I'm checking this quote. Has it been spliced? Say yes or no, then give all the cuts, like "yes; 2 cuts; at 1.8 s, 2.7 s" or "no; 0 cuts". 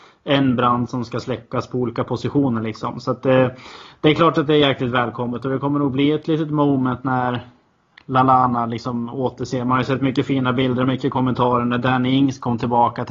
no; 0 cuts